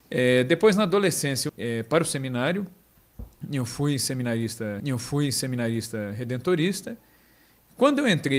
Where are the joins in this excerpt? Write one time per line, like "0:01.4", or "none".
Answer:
0:01.5
0:04.8